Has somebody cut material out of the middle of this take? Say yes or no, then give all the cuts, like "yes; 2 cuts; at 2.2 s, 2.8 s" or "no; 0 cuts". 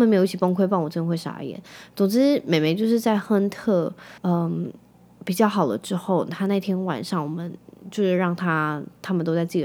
yes; 1 cut; at 4.2 s